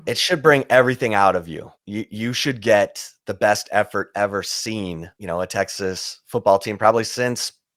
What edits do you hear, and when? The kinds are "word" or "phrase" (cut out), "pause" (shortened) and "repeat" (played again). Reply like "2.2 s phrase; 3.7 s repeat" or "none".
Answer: 1.7 s pause; 4.1 s word; 5.2 s phrase